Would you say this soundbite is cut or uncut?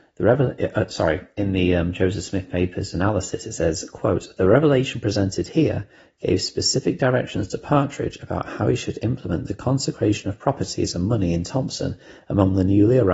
uncut